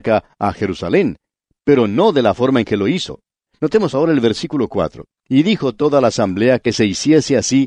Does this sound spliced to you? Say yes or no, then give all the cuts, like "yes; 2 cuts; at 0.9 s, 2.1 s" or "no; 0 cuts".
no; 0 cuts